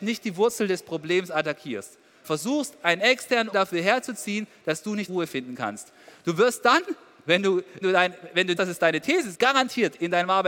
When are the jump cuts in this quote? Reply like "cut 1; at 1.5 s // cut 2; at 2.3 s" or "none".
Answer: cut 1; at 2.2 s // cut 2; at 3.5 s // cut 3; at 5.1 s // cut 4; at 7.8 s // cut 5; at 8.6 s // cut 6; at 9.3 s